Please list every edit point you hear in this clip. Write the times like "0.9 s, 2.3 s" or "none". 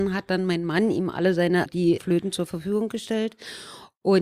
1.7 s, 2.0 s